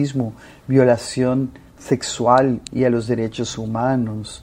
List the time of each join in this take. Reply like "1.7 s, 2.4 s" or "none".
none